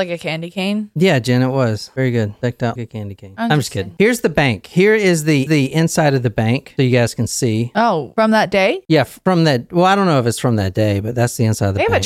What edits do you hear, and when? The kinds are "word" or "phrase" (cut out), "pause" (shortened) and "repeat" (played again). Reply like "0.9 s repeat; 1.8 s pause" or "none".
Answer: 2.8 s word; 5.5 s repeat